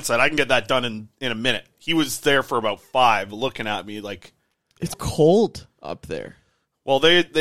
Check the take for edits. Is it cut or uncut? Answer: cut